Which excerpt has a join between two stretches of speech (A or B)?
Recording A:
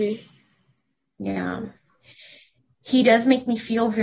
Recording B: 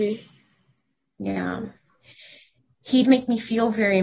B